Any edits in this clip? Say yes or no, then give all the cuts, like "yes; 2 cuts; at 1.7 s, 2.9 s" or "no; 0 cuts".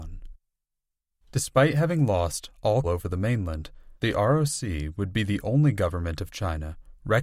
yes; 2 cuts; at 2.8 s, 4.0 s